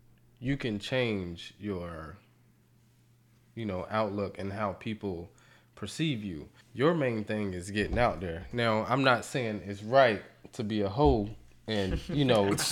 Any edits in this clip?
yes; 1 cut; at 6.6 s

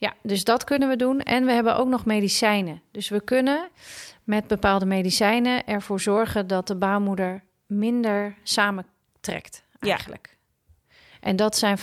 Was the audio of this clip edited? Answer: no; 0 cuts

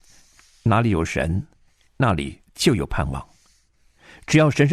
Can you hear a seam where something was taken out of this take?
yes; 1 cut; at 2.4 s

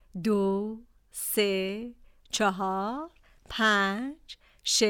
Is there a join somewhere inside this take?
no; 0 cuts

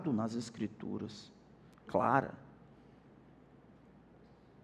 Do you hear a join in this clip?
yes; 1 cut; at 1.9 s

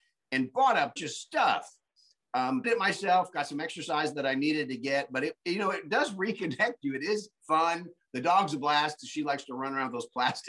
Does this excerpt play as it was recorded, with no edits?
no; 2 cuts; at 1.0 s, 2.6 s

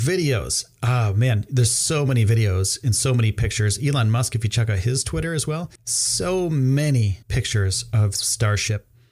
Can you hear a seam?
yes; 2 cuts; at 5.8 s, 7.2 s

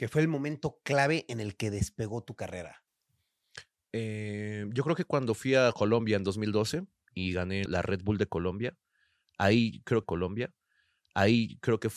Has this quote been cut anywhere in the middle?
yes; 2 cuts; at 7.7 s, 10.0 s

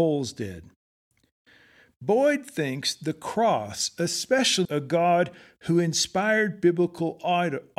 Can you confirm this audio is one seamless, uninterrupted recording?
no; 1 cut; at 4.6 s

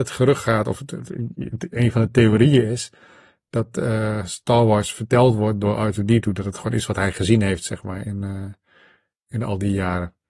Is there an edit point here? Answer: no; 0 cuts

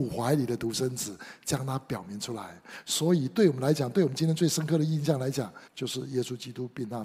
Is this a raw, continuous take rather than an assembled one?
no; 1 cut; at 5.7 s

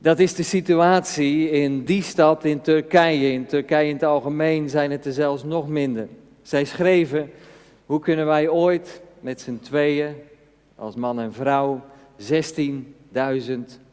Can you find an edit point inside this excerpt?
no; 0 cuts

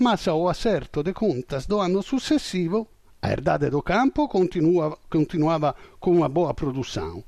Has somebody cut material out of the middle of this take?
no; 0 cuts

